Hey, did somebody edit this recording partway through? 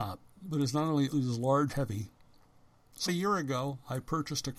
yes; 3 cuts; at 1.1 s, 1.7 s, 3.1 s

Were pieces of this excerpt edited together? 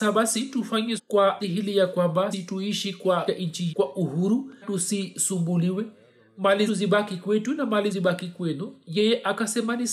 yes; 8 cuts; at 1.0 s, 1.4 s, 2.3 s, 3.3 s, 3.7 s, 4.6 s, 6.7 s, 7.9 s

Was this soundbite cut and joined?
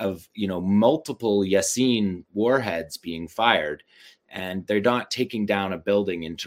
no; 0 cuts

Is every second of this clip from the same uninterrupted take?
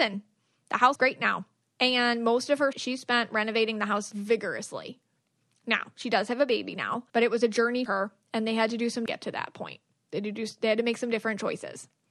no; 6 cuts; at 1.0 s, 2.7 s, 4.1 s, 7.1 s, 7.9 s, 9.1 s

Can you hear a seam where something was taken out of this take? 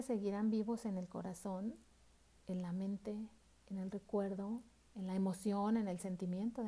no; 0 cuts

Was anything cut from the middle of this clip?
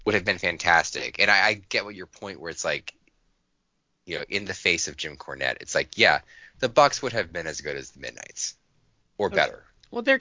no; 0 cuts

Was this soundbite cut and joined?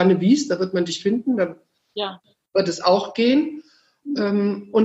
no; 0 cuts

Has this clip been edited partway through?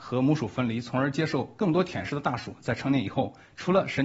no; 0 cuts

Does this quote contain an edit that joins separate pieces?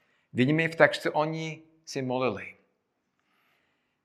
no; 0 cuts

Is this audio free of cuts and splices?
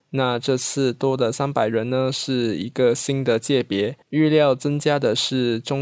no; 1 cut; at 4.0 s

